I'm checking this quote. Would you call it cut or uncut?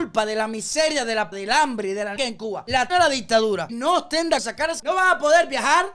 cut